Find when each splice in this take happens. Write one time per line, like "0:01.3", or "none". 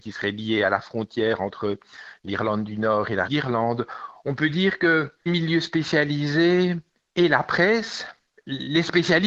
0:03.3
0:05.3